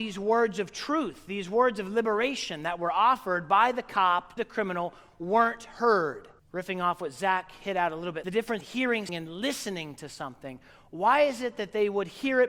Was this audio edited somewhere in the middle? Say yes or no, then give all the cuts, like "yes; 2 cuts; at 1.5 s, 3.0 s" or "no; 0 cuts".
yes; 5 cuts; at 4.4 s, 6.4 s, 8.2 s, 8.6 s, 9.1 s